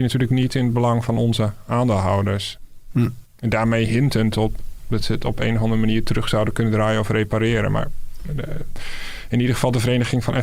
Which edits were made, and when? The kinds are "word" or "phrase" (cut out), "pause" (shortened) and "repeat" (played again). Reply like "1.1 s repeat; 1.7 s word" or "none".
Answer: none